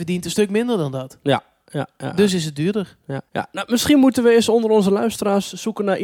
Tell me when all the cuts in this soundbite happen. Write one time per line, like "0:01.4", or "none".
0:03.3